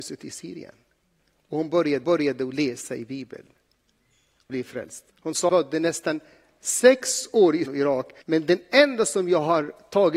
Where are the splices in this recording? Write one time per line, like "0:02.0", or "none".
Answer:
0:02.0
0:04.5
0:05.1
0:05.5
0:07.7
0:08.2